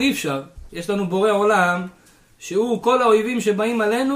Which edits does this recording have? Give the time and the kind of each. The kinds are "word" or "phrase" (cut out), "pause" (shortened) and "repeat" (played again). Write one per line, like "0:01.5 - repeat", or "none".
none